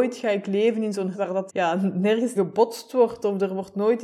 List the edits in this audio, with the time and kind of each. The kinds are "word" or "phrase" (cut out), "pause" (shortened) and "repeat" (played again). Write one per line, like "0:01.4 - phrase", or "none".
0:01.1 - word
0:01.5 - word
0:02.4 - word

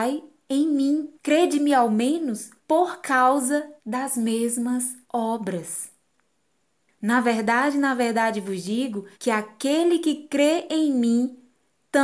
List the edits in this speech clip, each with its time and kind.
0:01.2 - pause
0:02.6 - pause
0:03.8 - pause
0:05.0 - pause
0:09.1 - pause

